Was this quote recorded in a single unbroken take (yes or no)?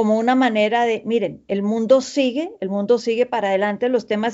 yes